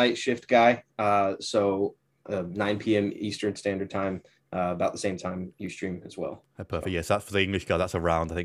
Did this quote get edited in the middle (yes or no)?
no